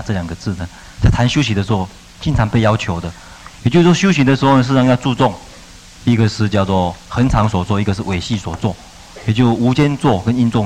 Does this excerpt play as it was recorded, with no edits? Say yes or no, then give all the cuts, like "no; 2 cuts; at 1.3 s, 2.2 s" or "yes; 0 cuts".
yes; 0 cuts